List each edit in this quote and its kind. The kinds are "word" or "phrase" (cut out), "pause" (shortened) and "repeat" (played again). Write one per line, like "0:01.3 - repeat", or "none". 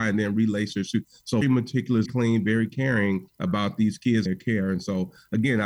0:01.4 - word
0:02.1 - word
0:03.3 - pause
0:04.3 - word